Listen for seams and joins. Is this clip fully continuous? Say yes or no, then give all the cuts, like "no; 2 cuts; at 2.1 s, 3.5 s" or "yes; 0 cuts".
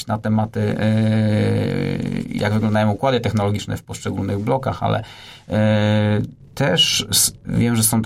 no; 1 cut; at 6.5 s